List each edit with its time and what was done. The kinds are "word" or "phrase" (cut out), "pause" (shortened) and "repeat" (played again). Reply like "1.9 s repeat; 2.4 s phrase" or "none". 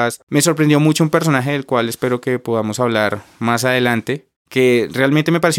none